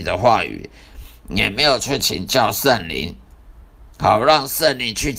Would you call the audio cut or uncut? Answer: cut